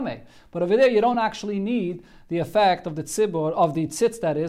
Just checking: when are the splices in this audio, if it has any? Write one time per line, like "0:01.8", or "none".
none